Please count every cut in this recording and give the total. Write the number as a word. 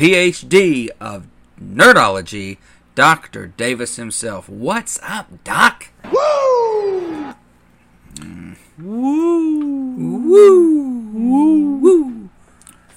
zero